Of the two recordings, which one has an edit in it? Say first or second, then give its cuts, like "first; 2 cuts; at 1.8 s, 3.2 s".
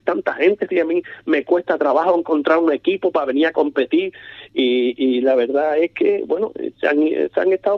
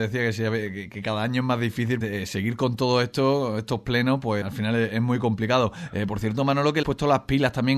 second; 3 cuts; at 2.0 s, 4.4 s, 6.8 s